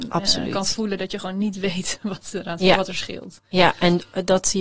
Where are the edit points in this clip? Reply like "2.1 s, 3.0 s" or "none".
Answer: none